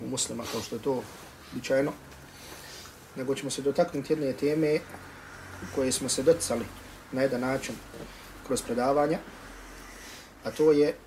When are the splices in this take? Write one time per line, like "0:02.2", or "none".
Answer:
none